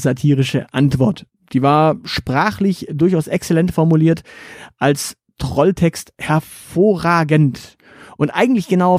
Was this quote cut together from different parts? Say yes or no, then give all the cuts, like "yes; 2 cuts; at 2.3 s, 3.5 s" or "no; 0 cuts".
no; 0 cuts